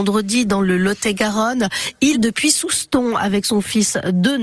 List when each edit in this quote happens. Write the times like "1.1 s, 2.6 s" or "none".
2.1 s